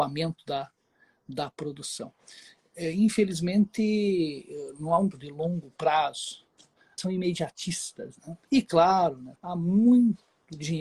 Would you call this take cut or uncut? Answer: cut